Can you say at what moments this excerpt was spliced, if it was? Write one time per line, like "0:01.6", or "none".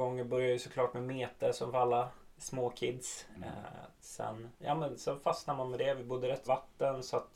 0:04.6
0:06.5